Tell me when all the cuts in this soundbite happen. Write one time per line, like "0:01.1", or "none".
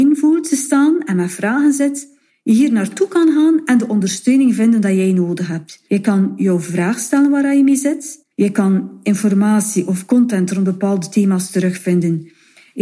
0:05.9
0:08.3